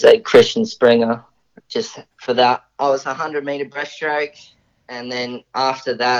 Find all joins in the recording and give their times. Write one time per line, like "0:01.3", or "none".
0:02.1

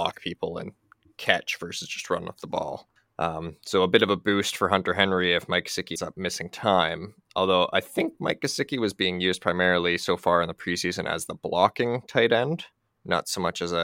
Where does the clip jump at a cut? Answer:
0:03.0
0:06.0

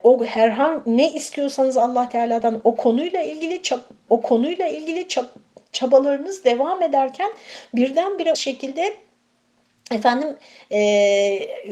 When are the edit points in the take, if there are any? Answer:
0:04.1
0:08.4

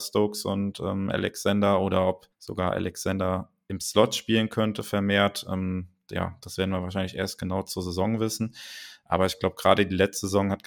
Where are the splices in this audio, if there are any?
0:02.3

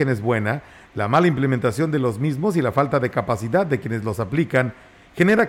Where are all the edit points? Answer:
none

